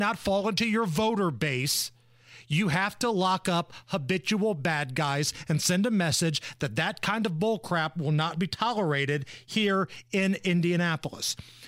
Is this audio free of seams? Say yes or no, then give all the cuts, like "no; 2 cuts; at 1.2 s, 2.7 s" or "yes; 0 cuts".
yes; 0 cuts